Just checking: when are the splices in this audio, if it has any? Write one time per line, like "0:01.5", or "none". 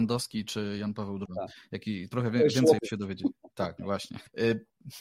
0:01.3
0:02.8
0:03.8